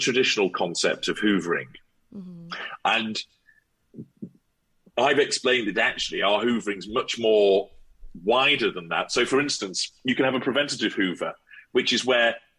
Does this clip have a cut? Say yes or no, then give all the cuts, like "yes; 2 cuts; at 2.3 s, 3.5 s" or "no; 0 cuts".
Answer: no; 0 cuts